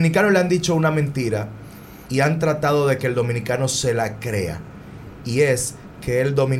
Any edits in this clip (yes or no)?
no